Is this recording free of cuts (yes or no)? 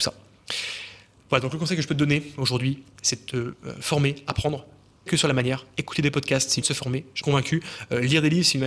no